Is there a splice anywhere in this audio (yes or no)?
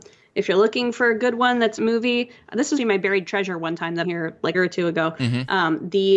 yes